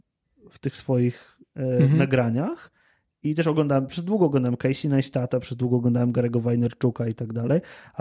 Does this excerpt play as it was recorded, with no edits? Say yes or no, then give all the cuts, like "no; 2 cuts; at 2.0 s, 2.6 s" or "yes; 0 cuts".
yes; 0 cuts